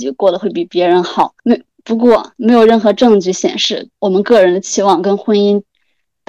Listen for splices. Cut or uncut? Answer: cut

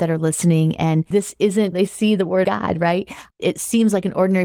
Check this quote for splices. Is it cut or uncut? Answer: cut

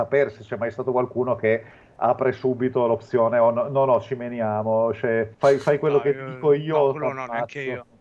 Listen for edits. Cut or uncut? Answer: cut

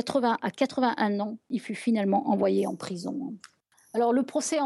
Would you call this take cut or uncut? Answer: uncut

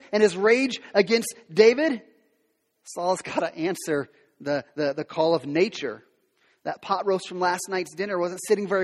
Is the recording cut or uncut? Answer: uncut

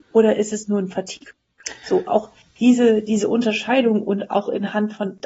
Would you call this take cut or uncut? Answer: cut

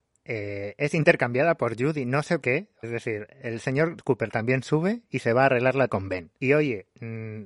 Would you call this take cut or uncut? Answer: cut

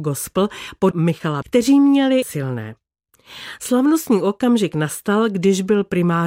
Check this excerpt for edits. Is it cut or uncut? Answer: cut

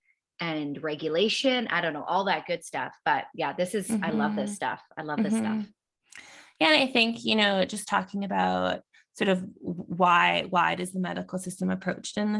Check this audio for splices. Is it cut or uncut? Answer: uncut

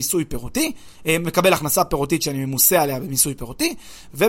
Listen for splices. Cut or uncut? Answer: uncut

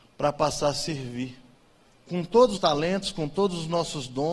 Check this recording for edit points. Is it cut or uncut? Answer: cut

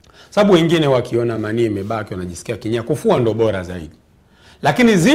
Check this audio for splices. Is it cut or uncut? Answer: uncut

